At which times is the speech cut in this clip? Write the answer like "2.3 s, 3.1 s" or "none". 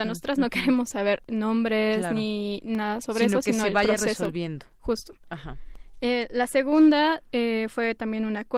none